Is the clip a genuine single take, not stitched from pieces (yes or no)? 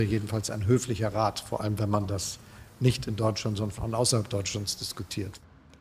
yes